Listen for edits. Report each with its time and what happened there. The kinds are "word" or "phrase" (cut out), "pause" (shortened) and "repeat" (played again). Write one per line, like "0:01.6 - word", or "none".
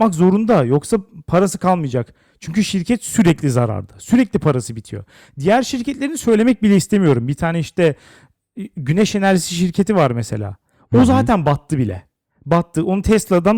none